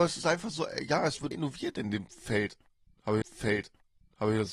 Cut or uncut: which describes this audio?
cut